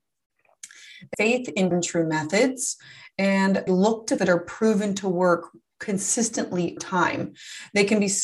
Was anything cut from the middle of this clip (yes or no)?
yes